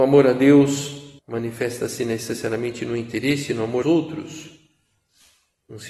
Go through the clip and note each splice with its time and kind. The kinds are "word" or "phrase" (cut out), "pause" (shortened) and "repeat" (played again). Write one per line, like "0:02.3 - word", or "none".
0:01.2 - pause
0:03.8 - word